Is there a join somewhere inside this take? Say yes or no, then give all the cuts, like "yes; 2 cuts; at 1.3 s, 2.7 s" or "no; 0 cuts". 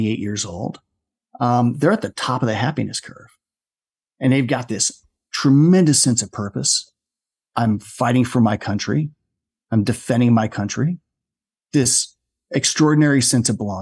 no; 0 cuts